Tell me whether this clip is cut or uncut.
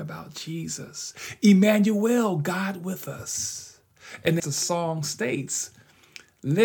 cut